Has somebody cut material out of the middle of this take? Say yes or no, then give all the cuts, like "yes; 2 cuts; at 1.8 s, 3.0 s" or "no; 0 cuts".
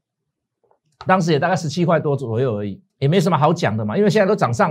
yes; 1 cut; at 2.9 s